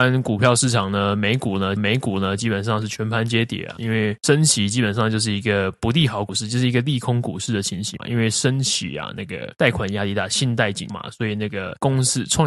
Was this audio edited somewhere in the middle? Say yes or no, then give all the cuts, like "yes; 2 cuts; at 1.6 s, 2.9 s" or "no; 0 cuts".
yes; 1 cut; at 1.8 s